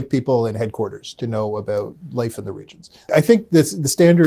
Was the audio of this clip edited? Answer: no; 0 cuts

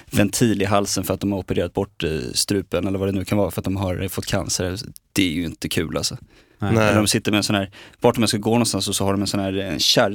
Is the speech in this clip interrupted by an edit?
no; 0 cuts

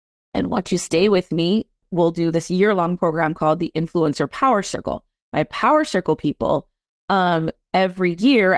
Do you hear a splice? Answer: no; 0 cuts

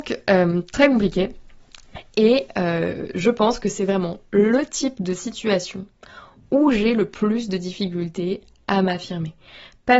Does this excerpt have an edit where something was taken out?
no; 0 cuts

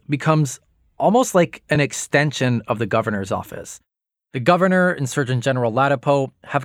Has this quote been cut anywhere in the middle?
no; 0 cuts

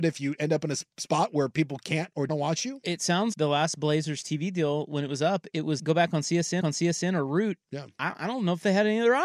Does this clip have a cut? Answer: yes; 5 cuts; at 0.9 s, 2.3 s, 3.3 s, 5.8 s, 6.6 s

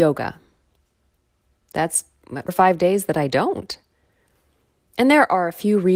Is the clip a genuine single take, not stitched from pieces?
no; 1 cut; at 2.5 s

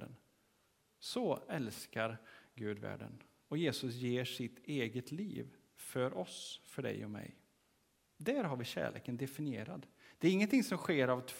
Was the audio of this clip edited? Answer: no; 0 cuts

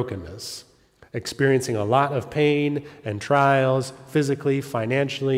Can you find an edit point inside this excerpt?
no; 0 cuts

